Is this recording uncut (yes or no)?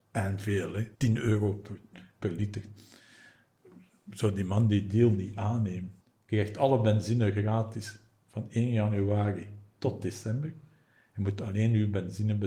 no